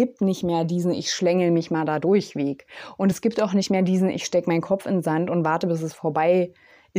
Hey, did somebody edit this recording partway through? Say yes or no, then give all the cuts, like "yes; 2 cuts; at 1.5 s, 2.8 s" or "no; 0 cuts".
no; 0 cuts